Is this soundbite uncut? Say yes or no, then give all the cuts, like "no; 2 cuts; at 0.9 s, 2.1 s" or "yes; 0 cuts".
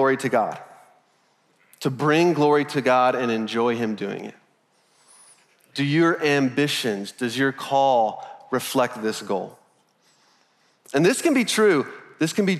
yes; 0 cuts